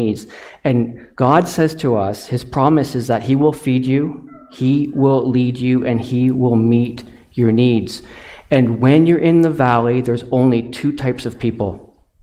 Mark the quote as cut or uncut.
uncut